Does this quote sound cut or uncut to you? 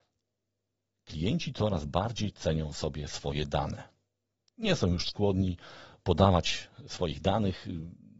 uncut